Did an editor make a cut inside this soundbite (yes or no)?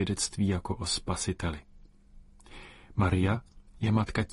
no